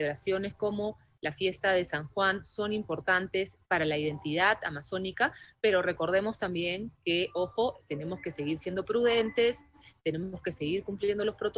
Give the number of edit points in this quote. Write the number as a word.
zero